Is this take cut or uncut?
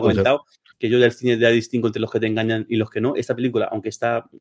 uncut